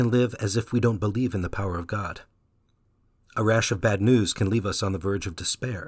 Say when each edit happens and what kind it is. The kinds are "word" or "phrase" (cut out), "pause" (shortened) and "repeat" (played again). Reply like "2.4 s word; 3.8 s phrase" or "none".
none